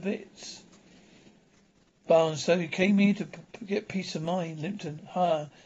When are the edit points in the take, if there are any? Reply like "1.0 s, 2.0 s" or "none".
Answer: none